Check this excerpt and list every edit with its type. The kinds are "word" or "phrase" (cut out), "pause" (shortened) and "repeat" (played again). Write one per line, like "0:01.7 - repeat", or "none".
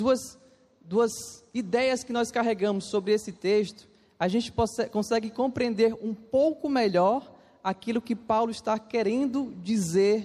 none